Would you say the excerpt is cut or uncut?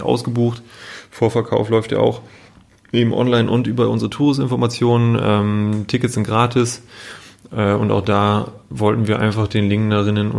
uncut